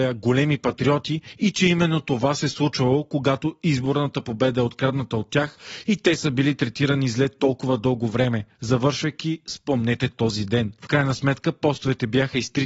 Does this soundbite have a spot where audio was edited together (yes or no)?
no